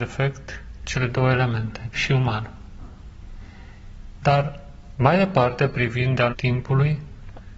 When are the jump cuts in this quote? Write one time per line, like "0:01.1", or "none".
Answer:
0:01.9
0:06.3